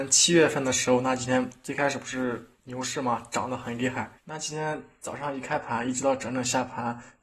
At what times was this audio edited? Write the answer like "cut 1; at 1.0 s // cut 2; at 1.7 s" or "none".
cut 1; at 4.2 s